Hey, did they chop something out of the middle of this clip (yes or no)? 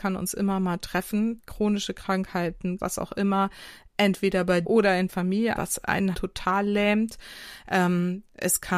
yes